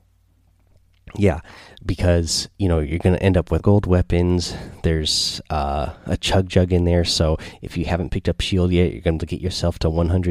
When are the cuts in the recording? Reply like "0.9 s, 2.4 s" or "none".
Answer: 3.6 s, 9.2 s